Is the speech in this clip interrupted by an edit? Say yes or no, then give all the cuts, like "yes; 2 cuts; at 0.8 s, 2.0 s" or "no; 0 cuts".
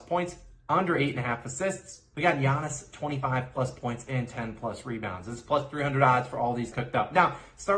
yes; 1 cut; at 6.7 s